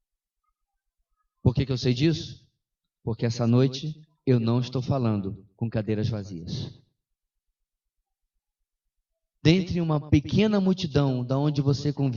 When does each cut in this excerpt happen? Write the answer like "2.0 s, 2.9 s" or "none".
none